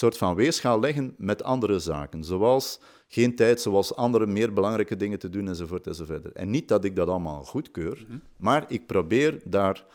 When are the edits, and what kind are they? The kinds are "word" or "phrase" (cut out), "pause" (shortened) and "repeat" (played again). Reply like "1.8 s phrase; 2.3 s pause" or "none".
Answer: none